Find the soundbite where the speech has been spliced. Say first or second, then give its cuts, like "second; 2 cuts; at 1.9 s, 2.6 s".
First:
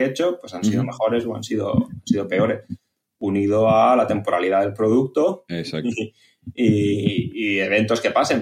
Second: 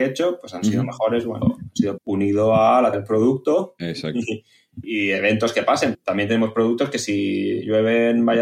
second; 5 cuts; at 1.4 s, 2.0 s, 2.9 s, 4.8 s, 5.9 s